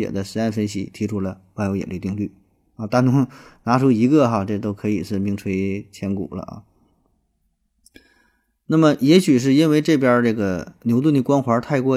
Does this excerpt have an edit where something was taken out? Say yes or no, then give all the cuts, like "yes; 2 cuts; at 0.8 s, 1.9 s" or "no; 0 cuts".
no; 0 cuts